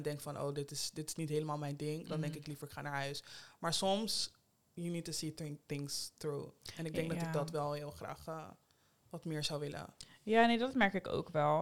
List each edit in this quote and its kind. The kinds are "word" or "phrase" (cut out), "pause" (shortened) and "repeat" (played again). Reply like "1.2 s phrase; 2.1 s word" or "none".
none